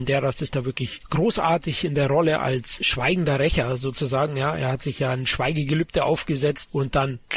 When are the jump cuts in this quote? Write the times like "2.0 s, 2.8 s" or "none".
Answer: none

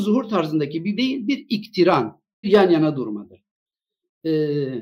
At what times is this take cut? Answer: 1.0 s, 2.4 s

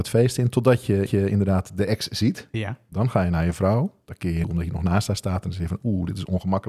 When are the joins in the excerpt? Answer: 1.1 s, 4.0 s, 4.4 s

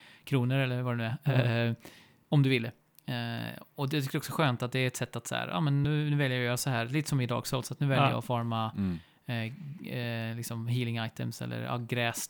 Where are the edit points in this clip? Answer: none

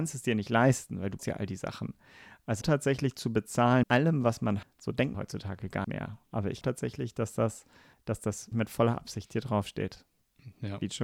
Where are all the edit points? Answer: 1.2 s, 2.6 s, 3.8 s, 4.6 s, 5.1 s, 5.8 s, 6.6 s, 7.9 s, 8.5 s

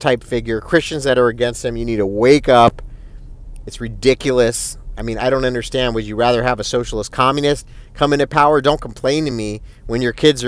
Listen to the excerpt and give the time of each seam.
none

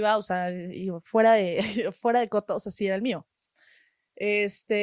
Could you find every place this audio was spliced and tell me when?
none

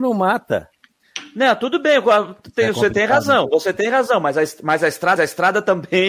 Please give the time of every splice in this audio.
5.2 s

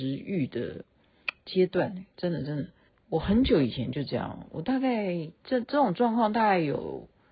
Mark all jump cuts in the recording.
2.9 s, 5.4 s

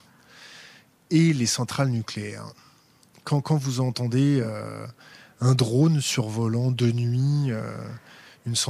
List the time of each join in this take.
none

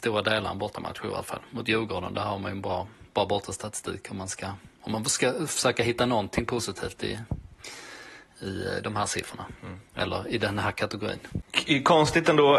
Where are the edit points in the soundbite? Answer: 11.5 s

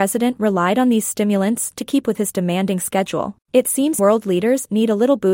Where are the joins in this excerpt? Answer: 2.0 s, 3.4 s, 4.0 s

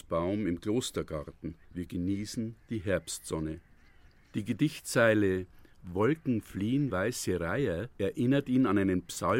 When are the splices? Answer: 1.6 s, 4.1 s, 6.9 s, 7.9 s

